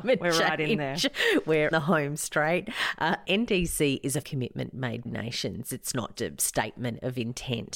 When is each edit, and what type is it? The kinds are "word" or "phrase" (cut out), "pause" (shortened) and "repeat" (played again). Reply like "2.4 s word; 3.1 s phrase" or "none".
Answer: 1.7 s word; 3.2 s word; 4.2 s word; 5.0 s word; 6.1 s word